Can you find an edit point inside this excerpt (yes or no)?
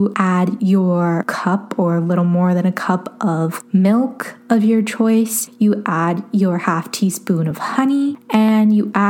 no